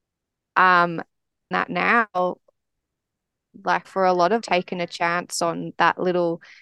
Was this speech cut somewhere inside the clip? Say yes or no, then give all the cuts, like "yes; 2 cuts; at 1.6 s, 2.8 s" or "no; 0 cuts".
yes; 3 cuts; at 1.5 s, 3.8 s, 4.4 s